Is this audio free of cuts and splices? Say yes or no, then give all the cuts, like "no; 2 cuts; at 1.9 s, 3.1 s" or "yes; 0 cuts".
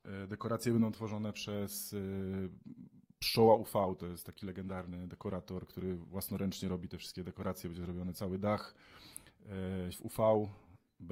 no; 1 cut; at 9.9 s